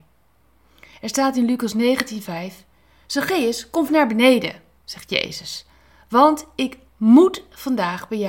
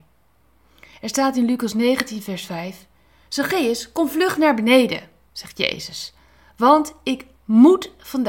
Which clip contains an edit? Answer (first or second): first